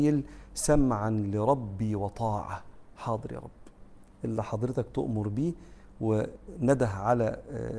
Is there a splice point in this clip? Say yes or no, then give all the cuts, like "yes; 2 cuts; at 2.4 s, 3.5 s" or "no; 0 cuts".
no; 0 cuts